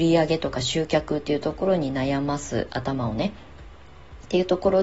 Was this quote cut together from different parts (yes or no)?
no